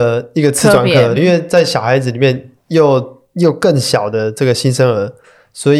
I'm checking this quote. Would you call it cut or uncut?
cut